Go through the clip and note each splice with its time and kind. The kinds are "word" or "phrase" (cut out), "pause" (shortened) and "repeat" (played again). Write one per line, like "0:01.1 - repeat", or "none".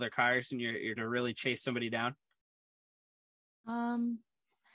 0:01.0 - word